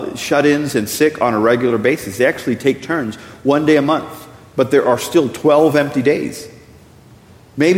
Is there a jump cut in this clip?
no; 0 cuts

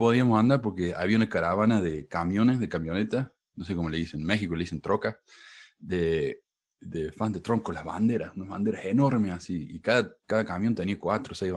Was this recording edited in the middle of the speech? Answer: yes; 1 cut; at 6.8 s

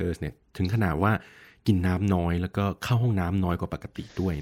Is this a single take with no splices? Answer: yes; 0 cuts

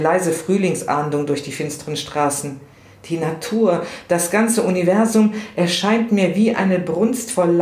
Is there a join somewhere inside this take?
no; 0 cuts

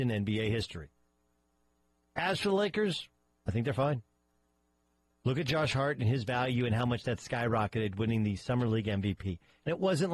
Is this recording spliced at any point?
no; 0 cuts

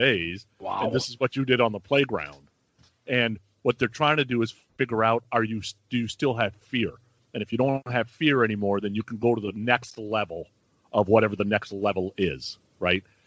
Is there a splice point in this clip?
no; 0 cuts

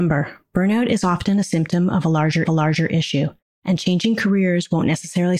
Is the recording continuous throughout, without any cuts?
no; 1 cut; at 2.4 s

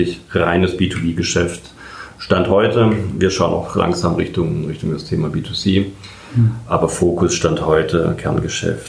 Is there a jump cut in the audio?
no; 0 cuts

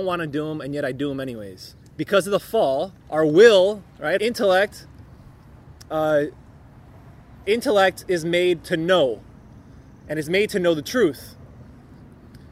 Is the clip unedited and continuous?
no; 4 cuts; at 1.8 s, 3.0 s, 4.2 s, 7.4 s

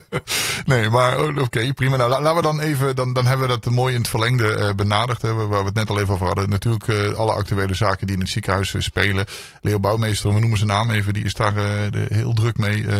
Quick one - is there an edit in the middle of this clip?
no; 0 cuts

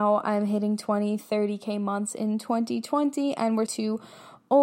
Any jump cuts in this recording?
yes; 1 cut; at 3.7 s

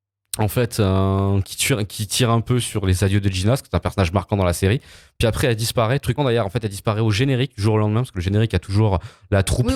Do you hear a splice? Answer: yes; 1 cut; at 6.2 s

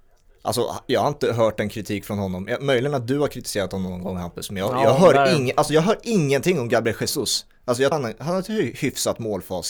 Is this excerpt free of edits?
no; 1 cut; at 7.9 s

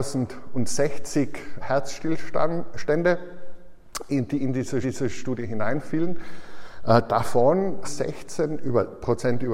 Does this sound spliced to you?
yes; 3 cuts; at 1.6 s, 4.8 s, 7.8 s

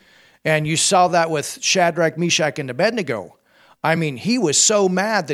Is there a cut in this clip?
no; 0 cuts

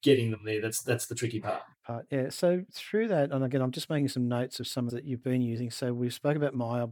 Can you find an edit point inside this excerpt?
yes; 2 cuts; at 2.7 s, 4.9 s

